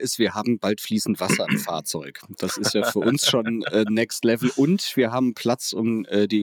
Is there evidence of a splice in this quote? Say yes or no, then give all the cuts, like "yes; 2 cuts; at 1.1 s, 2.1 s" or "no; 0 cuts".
no; 0 cuts